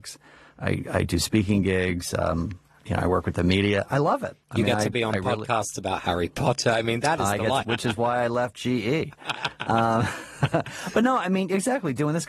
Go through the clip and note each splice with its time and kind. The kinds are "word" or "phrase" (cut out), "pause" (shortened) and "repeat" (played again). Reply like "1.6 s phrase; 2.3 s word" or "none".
7.6 s phrase